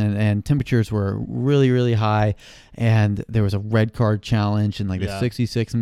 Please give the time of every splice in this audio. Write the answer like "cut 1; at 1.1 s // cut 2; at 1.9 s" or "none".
none